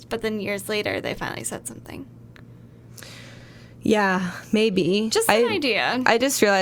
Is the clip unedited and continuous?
yes; 0 cuts

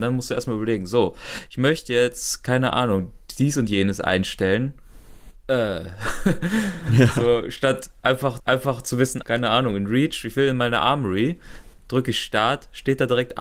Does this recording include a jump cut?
yes; 2 cuts; at 8.4 s, 9.2 s

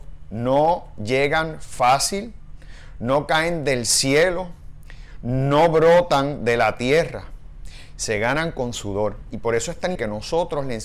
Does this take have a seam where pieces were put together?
yes; 1 cut; at 10.0 s

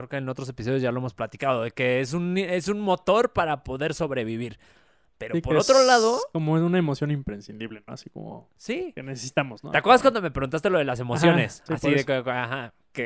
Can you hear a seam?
no; 0 cuts

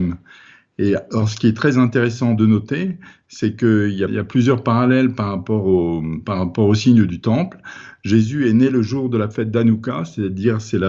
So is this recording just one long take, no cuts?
no; 1 cut; at 4.1 s

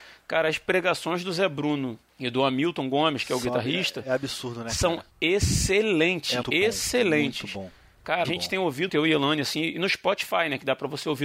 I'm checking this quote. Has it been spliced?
yes; 5 cuts; at 2.1 s, 5.1 s, 6.4 s, 8.2 s, 8.9 s

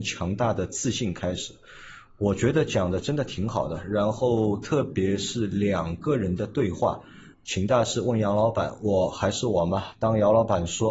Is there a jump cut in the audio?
yes; 1 cut; at 7.3 s

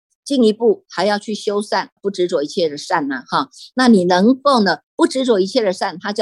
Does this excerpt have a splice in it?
yes; 1 cut; at 2.0 s

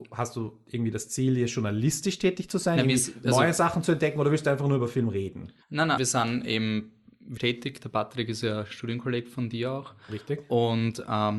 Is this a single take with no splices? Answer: no; 3 cuts; at 5.6 s, 6.0 s, 7.4 s

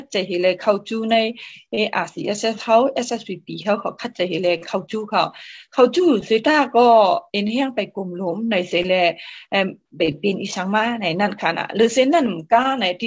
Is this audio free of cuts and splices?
yes; 0 cuts

